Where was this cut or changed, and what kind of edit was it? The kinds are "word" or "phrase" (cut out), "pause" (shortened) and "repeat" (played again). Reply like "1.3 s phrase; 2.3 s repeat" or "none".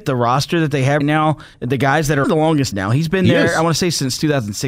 1.0 s word; 1.5 s pause; 2.2 s phrase; 2.7 s word